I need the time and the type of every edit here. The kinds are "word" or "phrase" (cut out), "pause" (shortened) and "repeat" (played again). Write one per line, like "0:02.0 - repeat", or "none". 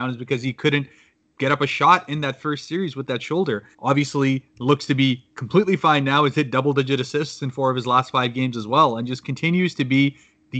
0:03.7 - pause

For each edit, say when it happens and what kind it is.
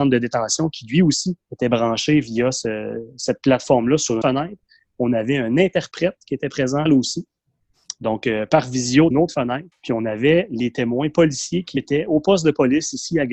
0:01.4 - pause
0:04.2 - word
0:06.9 - phrase
0:09.1 - phrase
0:09.7 - pause
0:11.8 - word

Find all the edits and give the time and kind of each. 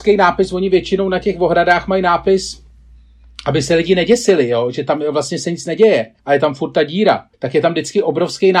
0:06.2 - pause
0:07.3 - pause

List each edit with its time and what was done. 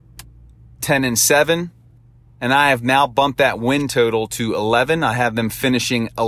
0:02.0 - pause

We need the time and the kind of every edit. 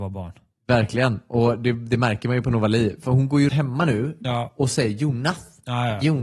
0:03.5 - word

